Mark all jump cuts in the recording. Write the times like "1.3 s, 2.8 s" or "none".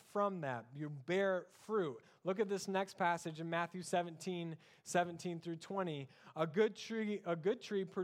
none